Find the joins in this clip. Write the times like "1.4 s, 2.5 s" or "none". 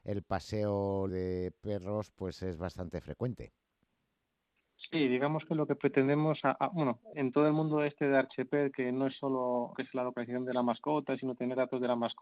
1.1 s, 7.1 s, 9.7 s